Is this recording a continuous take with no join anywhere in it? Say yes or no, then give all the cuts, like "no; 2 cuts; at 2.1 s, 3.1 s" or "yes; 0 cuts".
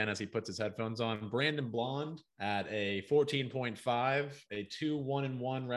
no; 2 cuts; at 2.3 s, 4.5 s